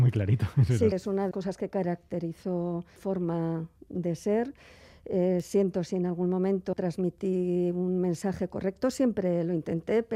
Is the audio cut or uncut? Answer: cut